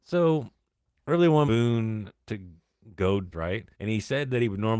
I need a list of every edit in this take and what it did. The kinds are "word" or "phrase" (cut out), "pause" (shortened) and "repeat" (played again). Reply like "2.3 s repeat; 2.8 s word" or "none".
1.5 s word; 2.2 s word; 3.3 s phrase; 3.7 s pause